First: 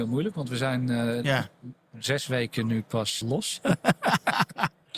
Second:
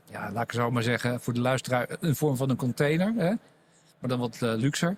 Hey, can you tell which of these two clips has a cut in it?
first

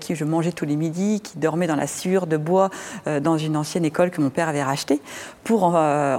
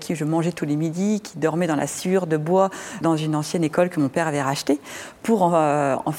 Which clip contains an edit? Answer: second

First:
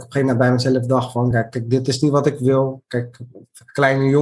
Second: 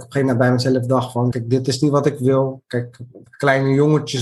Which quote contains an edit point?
second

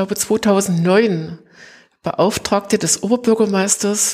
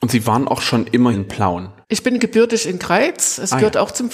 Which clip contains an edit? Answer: second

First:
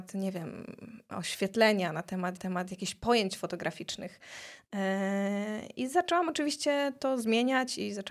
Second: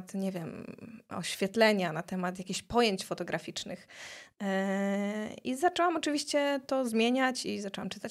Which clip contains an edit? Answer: first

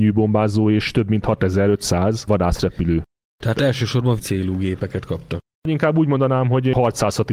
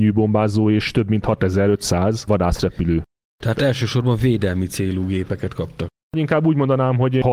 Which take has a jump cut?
first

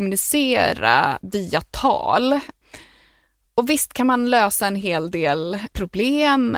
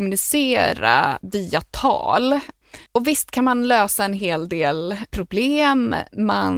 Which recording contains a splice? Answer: second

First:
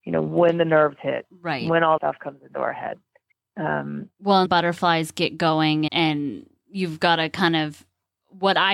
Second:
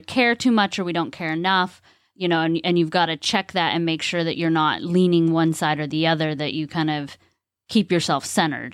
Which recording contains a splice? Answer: first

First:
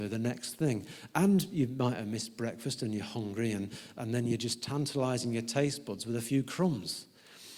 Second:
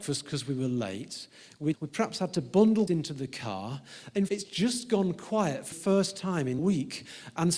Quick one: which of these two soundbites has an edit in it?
second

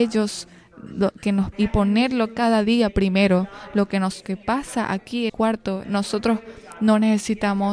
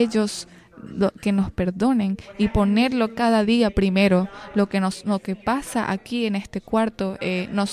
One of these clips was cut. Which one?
first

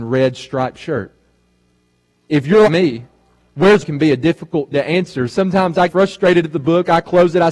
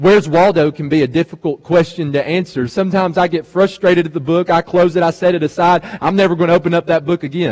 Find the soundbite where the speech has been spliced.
first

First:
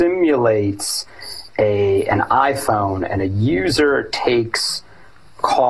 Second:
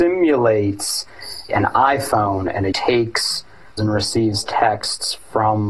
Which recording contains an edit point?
second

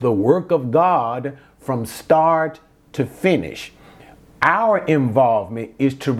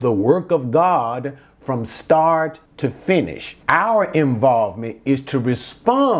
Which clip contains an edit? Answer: second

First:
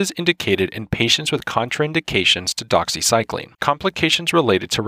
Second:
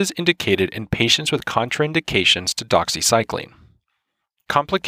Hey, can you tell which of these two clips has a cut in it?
first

